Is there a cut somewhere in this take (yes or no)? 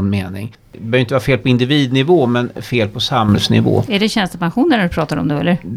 no